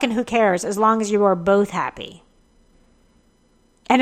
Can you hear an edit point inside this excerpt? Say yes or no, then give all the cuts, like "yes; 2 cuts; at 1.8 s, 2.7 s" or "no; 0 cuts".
no; 0 cuts